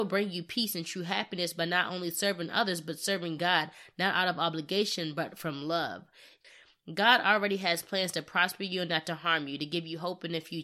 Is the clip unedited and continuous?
yes; 0 cuts

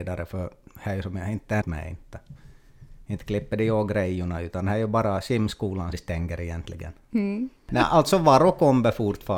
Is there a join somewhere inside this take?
yes; 2 cuts; at 1.6 s, 5.9 s

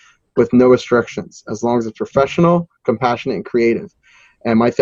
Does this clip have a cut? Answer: no; 0 cuts

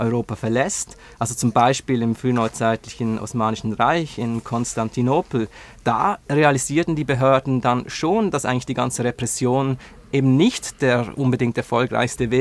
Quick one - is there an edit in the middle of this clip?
no; 0 cuts

